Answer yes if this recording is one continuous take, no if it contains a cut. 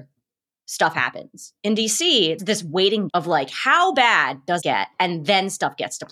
no